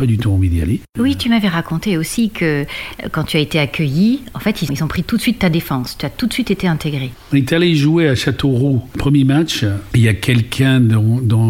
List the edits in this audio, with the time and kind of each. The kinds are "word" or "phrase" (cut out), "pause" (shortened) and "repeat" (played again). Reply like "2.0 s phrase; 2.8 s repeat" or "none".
4.7 s word